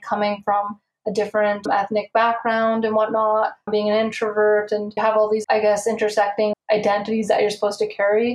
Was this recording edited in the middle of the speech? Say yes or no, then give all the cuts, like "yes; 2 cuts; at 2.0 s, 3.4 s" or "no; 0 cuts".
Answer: yes; 5 cuts; at 1.7 s, 3.7 s, 5.0 s, 5.4 s, 6.5 s